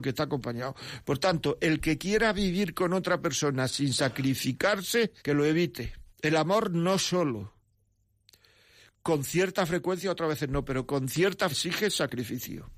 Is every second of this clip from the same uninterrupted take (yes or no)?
no